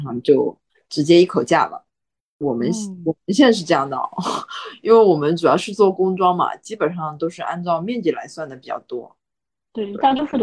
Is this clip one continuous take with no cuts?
yes; 0 cuts

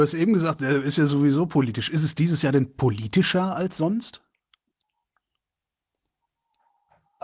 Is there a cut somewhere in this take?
no; 0 cuts

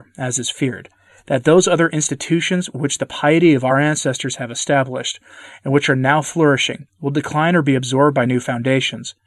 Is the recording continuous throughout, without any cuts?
yes; 0 cuts

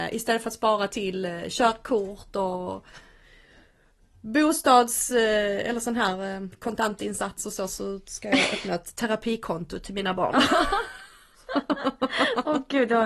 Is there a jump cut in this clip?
no; 0 cuts

